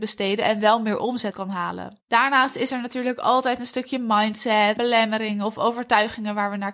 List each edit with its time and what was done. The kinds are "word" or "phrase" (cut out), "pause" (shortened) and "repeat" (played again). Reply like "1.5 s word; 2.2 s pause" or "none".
1.3 s word; 4.8 s word